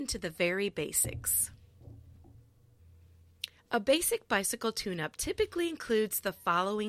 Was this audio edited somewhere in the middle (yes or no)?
no